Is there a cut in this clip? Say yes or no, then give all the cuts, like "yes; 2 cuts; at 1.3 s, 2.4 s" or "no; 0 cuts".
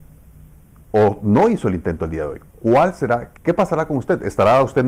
yes; 1 cut; at 3.4 s